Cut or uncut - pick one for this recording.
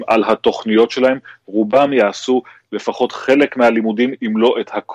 uncut